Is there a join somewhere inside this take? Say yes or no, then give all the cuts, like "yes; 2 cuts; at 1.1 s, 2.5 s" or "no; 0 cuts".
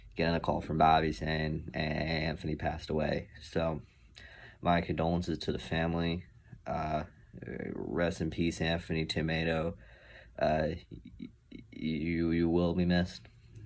no; 0 cuts